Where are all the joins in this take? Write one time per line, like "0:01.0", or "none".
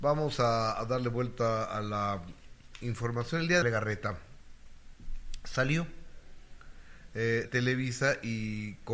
0:03.6
0:07.4

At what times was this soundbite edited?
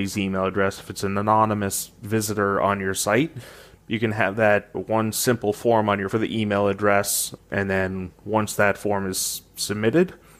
0:04.7
0:06.1
0:07.4

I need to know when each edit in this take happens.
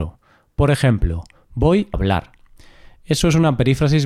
0:01.9

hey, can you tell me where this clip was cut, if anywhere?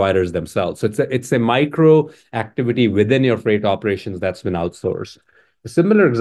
none

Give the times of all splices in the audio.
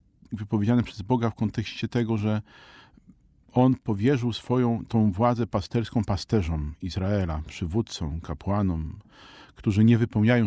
none

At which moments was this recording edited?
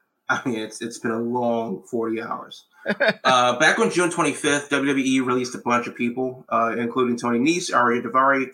none

